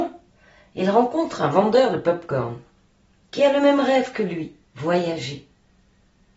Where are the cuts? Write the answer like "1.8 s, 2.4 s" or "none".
none